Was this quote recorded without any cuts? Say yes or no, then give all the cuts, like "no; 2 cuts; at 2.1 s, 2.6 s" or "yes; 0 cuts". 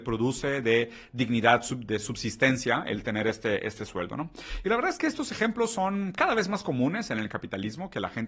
yes; 0 cuts